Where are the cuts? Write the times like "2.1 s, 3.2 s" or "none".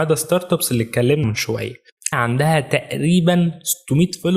1.2 s, 2.1 s